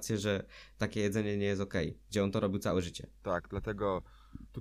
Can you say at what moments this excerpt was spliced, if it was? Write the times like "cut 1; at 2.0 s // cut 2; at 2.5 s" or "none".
cut 1; at 3.1 s